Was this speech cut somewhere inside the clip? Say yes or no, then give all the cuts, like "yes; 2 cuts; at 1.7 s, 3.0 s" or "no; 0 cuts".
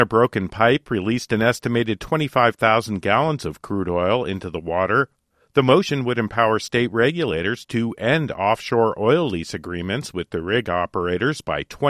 no; 0 cuts